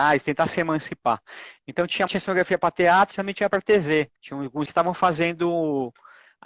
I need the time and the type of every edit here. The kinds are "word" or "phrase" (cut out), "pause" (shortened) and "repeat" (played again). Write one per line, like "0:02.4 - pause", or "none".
0:02.1 - phrase
0:03.1 - word
0:04.2 - pause
0:04.7 - word